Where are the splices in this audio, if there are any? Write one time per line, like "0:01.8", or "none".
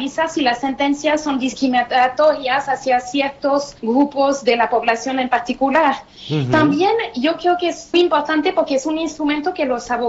0:03.8
0:07.9